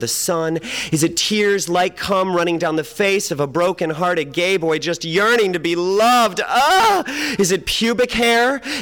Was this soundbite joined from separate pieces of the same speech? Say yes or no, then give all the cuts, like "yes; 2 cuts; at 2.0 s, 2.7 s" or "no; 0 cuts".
no; 0 cuts